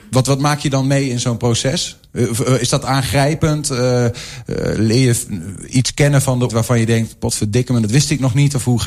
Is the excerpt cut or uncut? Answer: cut